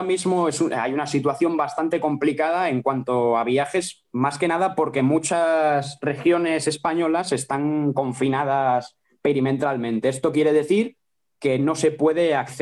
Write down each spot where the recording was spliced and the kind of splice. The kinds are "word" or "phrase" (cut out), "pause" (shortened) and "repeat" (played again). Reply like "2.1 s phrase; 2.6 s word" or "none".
none